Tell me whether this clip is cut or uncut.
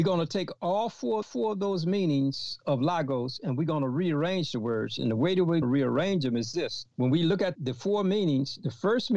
cut